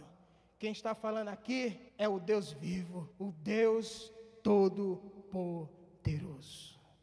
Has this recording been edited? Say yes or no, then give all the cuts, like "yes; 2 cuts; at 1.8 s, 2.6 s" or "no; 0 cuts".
yes; 2 cuts; at 1.9 s, 3.1 s